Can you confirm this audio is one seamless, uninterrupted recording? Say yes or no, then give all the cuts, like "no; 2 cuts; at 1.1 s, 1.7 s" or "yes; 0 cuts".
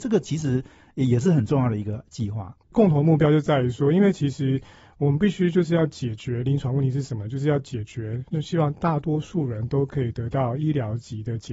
yes; 0 cuts